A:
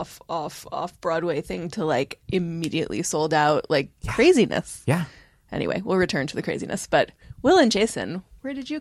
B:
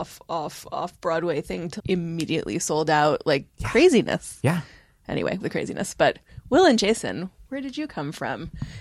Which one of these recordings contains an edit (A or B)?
B